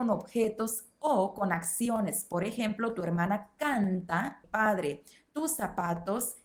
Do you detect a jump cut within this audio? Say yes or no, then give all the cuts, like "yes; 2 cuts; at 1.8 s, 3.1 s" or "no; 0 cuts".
yes; 1 cut; at 4.4 s